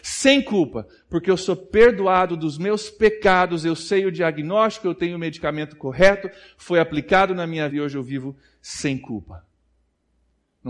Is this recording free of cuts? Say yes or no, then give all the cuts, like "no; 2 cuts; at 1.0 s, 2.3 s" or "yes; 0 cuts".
no; 1 cut; at 7.7 s